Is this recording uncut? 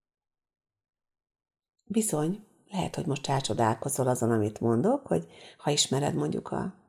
yes; 0 cuts

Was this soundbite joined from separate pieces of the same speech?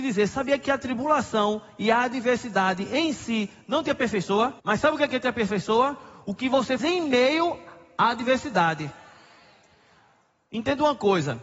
yes; 2 cuts; at 4.6 s, 6.8 s

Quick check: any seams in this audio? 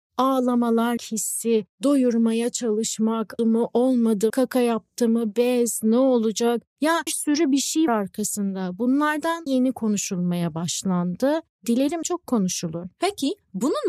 yes; 7 cuts; at 1.0 s, 3.4 s, 4.3 s, 7.1 s, 7.9 s, 9.5 s, 12.0 s

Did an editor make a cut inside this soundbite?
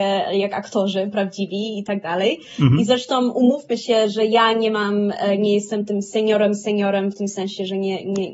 no; 0 cuts

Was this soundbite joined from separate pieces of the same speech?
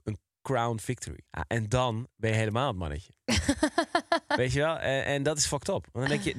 yes; 1 cut; at 1.3 s

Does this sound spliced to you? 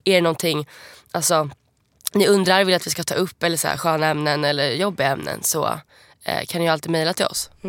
no; 0 cuts

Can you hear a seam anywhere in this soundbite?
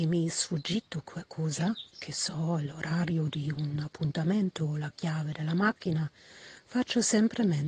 no; 0 cuts

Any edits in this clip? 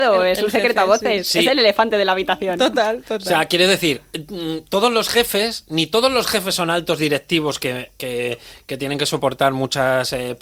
no; 0 cuts

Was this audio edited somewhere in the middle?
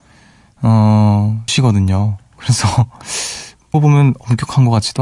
yes; 2 cuts; at 1.5 s, 3.7 s

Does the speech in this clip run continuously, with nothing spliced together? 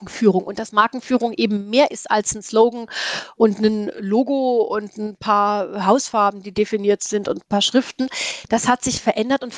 yes; 0 cuts

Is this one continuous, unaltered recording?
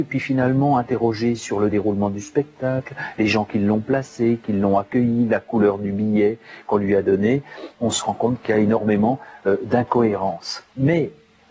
yes; 0 cuts

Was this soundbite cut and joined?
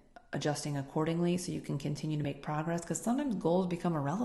no; 0 cuts

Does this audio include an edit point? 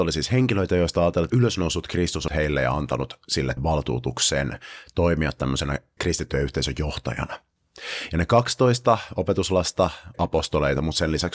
yes; 5 cuts; at 1.3 s, 2.3 s, 3.6 s, 6.0 s, 10.1 s

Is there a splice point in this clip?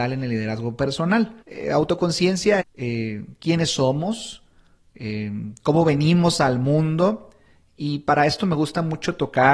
yes; 2 cuts; at 1.4 s, 2.6 s

